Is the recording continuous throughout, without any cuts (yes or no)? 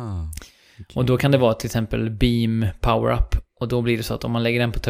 yes